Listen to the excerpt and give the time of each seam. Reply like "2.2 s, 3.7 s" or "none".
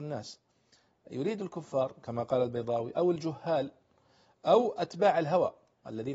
none